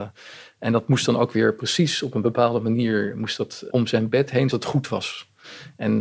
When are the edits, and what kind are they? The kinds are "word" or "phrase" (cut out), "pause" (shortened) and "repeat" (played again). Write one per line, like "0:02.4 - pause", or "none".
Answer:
0:03.7 - word
0:04.5 - phrase